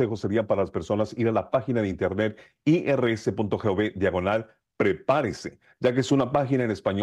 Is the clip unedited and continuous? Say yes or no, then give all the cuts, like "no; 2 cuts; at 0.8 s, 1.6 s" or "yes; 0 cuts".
yes; 0 cuts